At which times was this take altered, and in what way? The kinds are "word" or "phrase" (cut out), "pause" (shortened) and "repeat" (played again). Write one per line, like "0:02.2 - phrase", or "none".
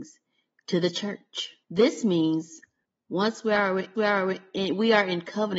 0:01.6 - pause
0:02.8 - pause
0:04.0 - repeat